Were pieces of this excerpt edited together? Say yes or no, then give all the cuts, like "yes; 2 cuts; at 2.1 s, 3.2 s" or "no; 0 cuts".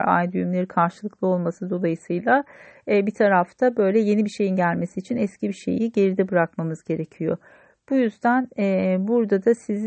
no; 0 cuts